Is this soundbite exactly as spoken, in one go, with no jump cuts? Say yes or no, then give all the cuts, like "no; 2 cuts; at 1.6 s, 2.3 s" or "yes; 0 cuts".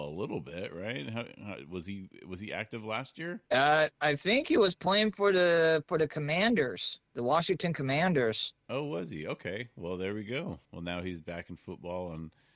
no; 1 cut; at 10.6 s